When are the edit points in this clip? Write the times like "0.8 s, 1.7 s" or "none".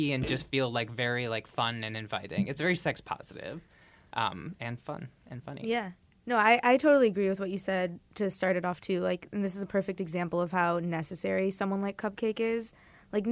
none